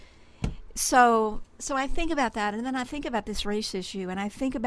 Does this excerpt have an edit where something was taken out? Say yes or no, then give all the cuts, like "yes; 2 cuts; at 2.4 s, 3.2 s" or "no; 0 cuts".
no; 0 cuts